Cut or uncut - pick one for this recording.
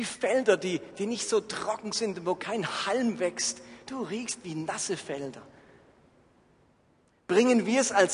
uncut